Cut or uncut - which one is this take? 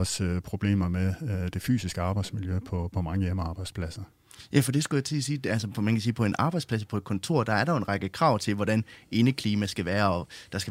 uncut